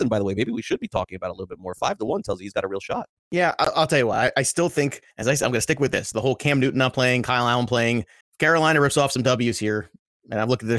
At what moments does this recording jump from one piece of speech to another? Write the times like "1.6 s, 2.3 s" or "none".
3.2 s, 5.1 s, 8.2 s